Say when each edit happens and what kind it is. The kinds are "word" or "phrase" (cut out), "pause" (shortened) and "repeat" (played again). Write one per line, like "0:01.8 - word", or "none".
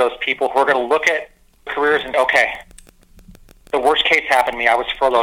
0:01.7 - word
0:02.1 - word